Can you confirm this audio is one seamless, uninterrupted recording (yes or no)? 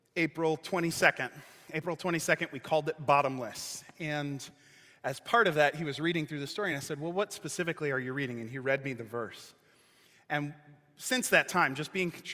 yes